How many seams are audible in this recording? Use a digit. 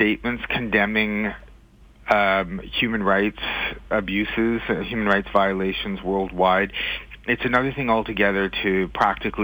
0